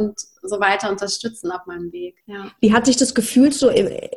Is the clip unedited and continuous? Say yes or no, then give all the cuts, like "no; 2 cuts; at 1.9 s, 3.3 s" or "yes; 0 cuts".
no; 1 cut; at 2.2 s